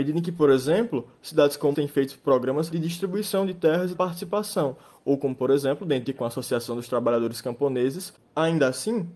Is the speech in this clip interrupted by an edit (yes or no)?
yes